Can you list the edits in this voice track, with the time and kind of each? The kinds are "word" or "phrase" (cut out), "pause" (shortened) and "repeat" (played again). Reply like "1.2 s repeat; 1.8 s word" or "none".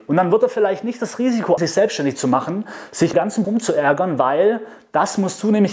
1.6 s word; 3.1 s phrase; 3.4 s word